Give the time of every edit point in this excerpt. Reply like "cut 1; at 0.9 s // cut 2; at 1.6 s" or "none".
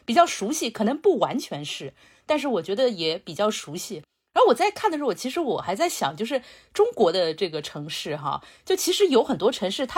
none